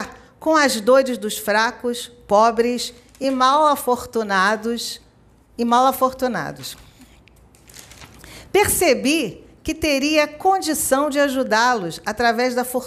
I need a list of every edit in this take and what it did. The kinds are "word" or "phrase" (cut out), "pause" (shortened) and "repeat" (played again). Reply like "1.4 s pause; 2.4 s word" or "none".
none